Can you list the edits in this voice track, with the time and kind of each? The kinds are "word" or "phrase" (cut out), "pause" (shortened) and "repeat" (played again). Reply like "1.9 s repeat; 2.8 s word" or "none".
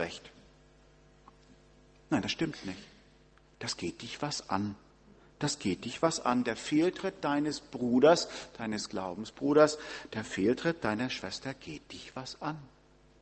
none